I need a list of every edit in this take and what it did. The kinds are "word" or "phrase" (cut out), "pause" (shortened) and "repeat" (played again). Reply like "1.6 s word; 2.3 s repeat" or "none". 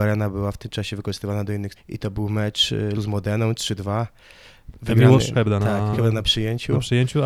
1.8 s word; 2.9 s word; 5.3 s word; 5.9 s word